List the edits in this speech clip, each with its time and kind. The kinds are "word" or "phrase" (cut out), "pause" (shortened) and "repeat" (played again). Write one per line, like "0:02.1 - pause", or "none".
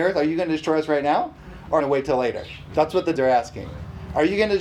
0:01.8 - phrase
0:03.1 - word